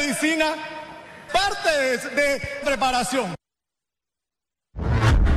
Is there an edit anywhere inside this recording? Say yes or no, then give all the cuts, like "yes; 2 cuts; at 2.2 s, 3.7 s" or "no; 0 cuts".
yes; 2 cuts; at 1.3 s, 2.6 s